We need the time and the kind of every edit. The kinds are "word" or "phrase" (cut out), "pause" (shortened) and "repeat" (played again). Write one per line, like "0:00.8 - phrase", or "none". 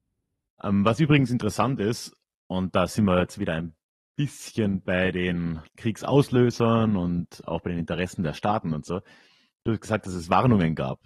0:05.7 - pause